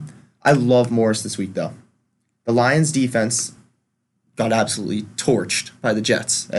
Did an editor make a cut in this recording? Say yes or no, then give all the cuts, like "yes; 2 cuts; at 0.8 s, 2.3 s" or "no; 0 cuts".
no; 0 cuts